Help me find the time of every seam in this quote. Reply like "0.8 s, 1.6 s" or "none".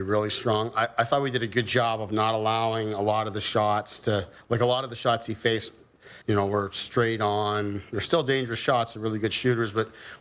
6.2 s